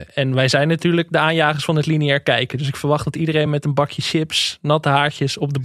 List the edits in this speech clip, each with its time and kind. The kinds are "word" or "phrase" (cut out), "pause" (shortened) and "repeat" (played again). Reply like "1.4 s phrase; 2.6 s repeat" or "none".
none